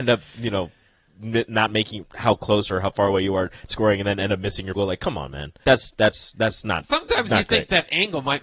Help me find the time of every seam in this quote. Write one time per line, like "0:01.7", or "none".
0:02.0
0:03.7
0:04.7
0:05.6